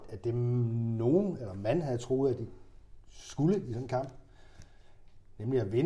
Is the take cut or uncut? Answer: uncut